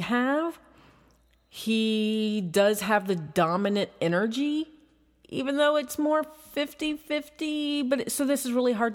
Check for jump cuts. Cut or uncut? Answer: uncut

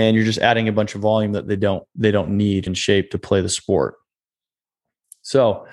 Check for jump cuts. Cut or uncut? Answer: cut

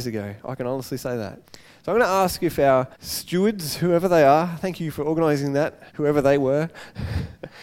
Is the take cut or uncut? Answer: cut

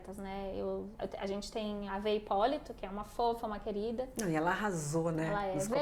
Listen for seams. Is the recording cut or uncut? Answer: cut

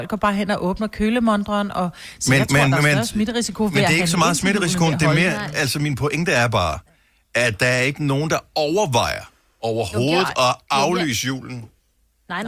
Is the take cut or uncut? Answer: uncut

